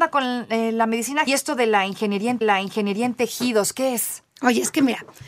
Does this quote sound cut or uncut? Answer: cut